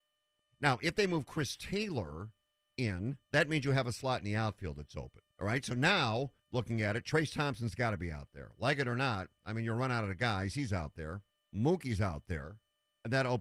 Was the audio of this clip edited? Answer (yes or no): yes